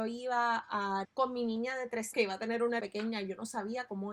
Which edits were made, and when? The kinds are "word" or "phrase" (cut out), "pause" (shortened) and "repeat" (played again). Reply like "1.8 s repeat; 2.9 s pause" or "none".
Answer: 1.0 s word; 2.1 s word; 2.8 s word